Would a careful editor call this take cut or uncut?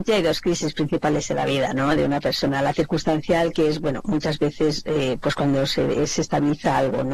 uncut